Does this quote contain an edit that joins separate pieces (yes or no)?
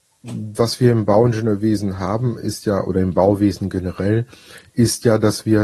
no